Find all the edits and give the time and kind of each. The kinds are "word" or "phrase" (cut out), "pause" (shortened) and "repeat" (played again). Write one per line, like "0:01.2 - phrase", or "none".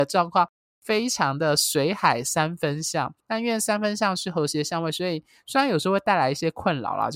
0:03.2 - pause